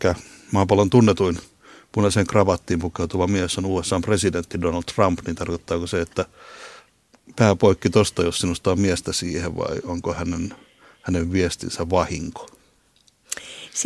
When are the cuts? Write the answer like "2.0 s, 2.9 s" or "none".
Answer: none